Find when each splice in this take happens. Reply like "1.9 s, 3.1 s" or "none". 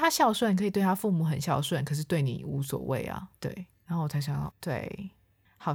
3.7 s, 4.5 s